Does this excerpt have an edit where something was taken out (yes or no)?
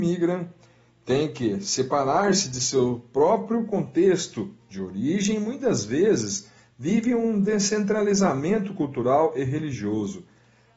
no